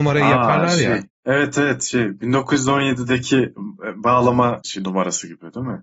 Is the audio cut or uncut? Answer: cut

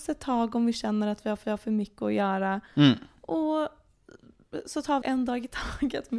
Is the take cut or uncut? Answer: cut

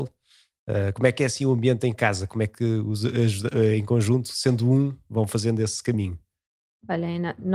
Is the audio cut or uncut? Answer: uncut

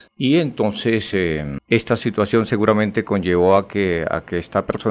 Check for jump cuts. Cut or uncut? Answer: uncut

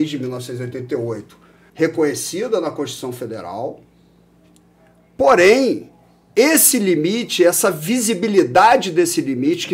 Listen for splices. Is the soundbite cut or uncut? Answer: cut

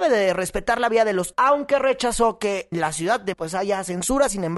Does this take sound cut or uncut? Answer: cut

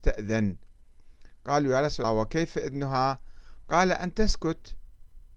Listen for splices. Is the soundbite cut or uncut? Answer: cut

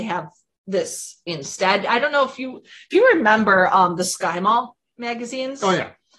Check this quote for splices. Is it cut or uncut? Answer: uncut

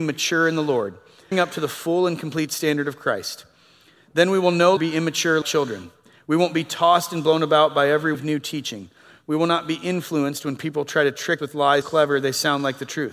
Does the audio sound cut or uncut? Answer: cut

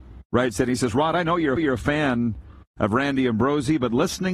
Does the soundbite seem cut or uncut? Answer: cut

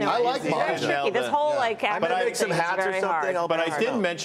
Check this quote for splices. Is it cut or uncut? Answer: uncut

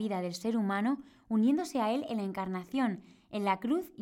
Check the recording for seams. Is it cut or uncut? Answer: uncut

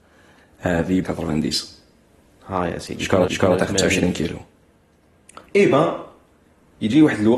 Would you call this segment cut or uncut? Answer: cut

